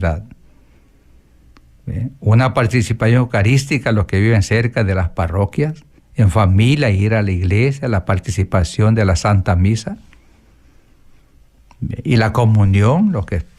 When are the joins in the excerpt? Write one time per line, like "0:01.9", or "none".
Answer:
0:06.0